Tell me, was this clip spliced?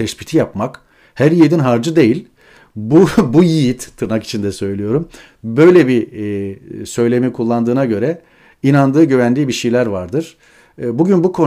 no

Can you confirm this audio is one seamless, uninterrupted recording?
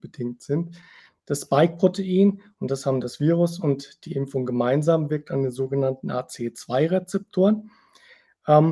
yes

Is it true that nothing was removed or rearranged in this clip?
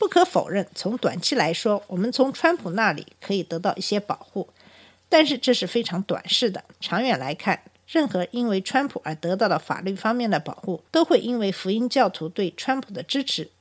no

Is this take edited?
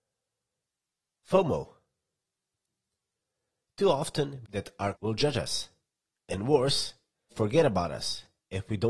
yes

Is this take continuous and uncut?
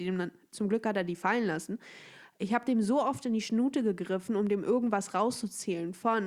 yes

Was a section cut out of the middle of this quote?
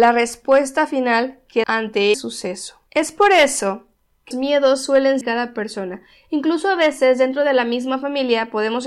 yes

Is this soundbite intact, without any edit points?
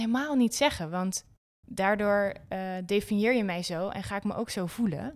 yes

